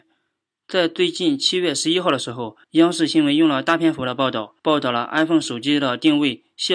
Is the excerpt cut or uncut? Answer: cut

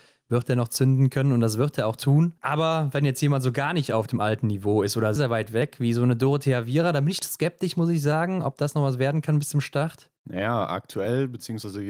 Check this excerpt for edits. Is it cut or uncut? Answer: cut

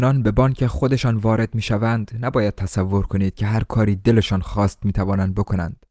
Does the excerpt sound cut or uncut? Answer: uncut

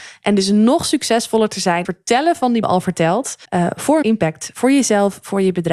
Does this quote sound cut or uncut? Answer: cut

